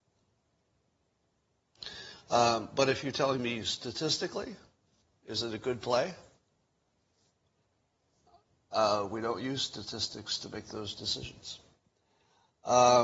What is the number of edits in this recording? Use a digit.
0